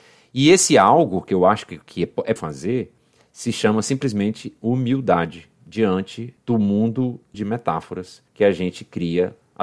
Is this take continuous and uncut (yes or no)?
no